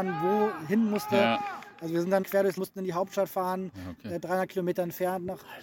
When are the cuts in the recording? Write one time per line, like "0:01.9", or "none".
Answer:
0:02.2
0:02.6